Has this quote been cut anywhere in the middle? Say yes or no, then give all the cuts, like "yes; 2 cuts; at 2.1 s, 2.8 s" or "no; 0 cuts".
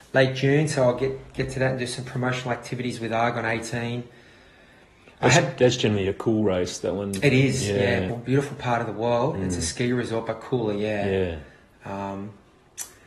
yes; 1 cut; at 8.1 s